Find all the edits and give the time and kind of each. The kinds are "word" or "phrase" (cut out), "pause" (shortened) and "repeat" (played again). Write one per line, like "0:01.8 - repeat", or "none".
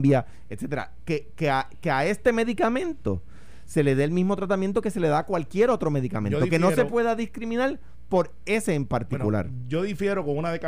none